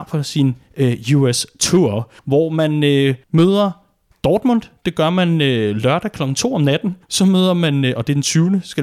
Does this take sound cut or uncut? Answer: cut